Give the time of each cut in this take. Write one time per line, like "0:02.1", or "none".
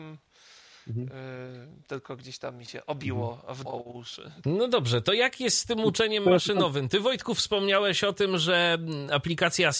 0:03.7

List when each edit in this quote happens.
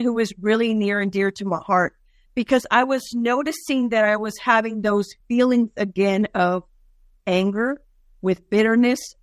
none

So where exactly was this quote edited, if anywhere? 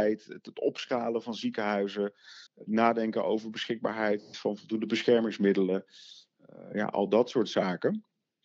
0:02.5

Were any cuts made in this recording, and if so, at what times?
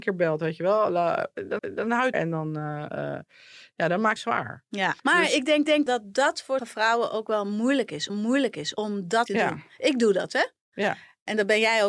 0:01.6
0:02.1
0:04.2
0:05.0
0:05.7
0:06.6
0:08.1
0:09.3

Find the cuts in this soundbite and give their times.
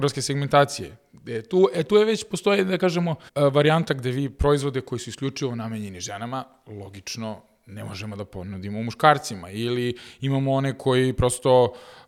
0:03.3

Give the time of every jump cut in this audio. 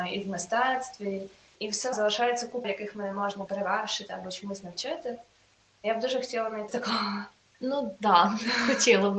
0:01.5
0:01.9
0:02.6
0:03.5
0:06.7

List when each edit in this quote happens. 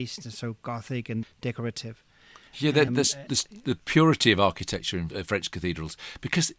0:01.2
0:02.9
0:05.1

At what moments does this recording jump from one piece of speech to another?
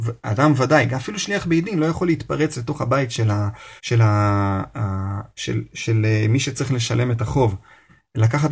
0:03.8

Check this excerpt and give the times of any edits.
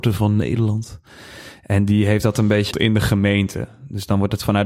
0:02.7

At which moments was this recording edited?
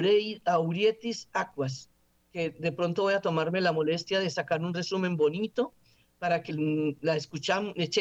0:06.5

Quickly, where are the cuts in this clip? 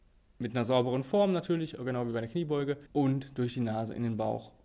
0:02.9

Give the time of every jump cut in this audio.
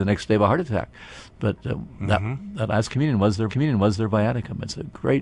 0:03.5

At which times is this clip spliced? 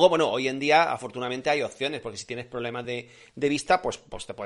none

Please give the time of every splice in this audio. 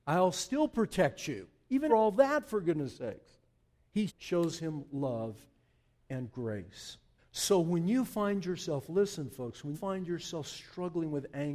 0:01.9
0:04.1
0:07.2
0:09.7

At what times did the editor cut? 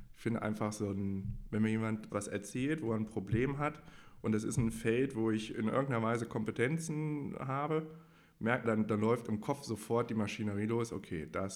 0:02.1
0:08.6

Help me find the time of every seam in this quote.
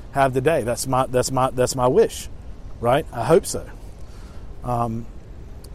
0:01.3

